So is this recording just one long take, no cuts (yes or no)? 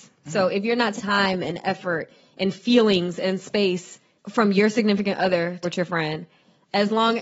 no